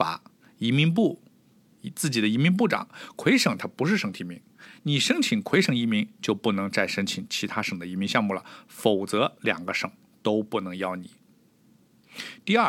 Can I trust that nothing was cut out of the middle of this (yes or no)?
yes